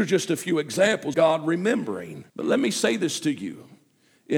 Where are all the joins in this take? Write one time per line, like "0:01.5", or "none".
0:01.1
0:02.3